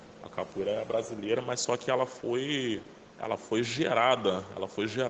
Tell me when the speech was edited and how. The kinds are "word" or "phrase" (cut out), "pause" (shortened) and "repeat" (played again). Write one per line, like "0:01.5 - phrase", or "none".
0:03.1 - pause